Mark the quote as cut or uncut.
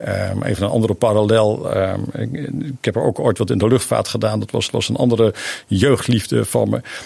cut